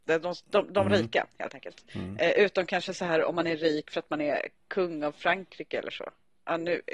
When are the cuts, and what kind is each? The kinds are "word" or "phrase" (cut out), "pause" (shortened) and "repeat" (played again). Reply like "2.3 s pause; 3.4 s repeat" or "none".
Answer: 1.9 s pause

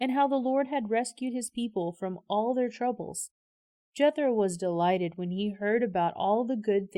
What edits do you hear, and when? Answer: none

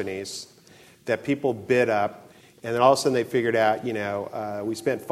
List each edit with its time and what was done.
none

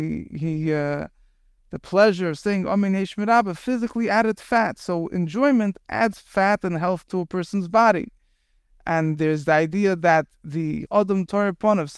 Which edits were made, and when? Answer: 10.9 s word

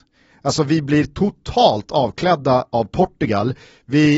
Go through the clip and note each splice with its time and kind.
none

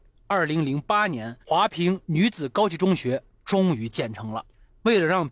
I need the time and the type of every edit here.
1.4 s pause

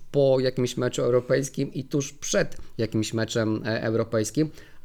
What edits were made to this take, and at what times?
none

